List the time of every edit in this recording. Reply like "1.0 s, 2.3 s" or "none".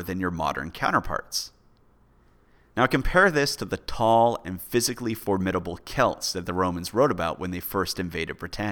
none